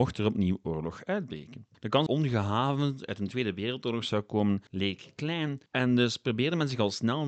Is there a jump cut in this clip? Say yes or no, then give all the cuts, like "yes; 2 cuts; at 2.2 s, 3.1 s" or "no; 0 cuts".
yes; 4 cuts; at 1.7 s, 2.1 s, 4.7 s, 5.7 s